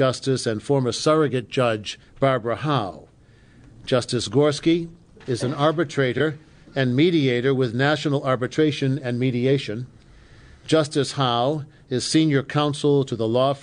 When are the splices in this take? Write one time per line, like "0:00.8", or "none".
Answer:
0:02.1